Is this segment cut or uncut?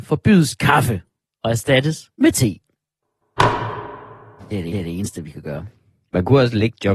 cut